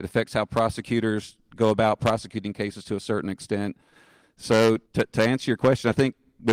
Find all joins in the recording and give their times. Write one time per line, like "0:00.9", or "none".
0:04.9